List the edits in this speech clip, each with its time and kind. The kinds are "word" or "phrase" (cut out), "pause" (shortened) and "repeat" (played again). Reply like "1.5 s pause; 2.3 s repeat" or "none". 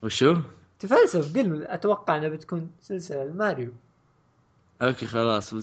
none